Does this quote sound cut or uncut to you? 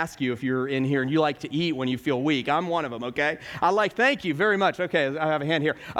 uncut